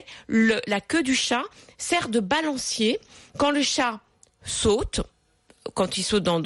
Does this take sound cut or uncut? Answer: uncut